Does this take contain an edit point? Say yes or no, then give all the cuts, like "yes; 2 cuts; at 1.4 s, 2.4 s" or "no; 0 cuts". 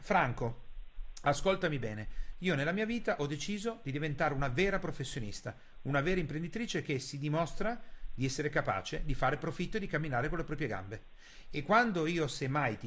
no; 0 cuts